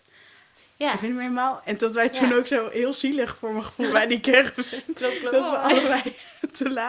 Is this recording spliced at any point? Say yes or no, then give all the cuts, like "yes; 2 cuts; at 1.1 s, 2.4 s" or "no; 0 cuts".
yes; 1 cut; at 3.9 s